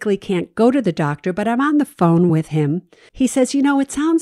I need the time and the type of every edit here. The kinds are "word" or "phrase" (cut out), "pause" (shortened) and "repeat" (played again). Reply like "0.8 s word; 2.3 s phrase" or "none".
none